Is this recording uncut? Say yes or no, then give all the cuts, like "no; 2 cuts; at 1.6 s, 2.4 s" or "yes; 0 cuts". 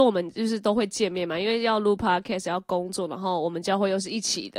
yes; 0 cuts